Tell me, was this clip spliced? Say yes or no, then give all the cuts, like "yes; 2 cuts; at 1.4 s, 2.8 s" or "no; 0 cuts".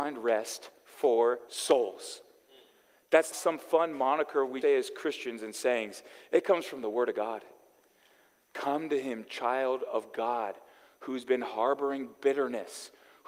yes; 3 cuts; at 1.5 s, 3.3 s, 4.6 s